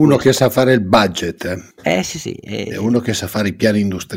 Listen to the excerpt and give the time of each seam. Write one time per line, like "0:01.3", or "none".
0:01.7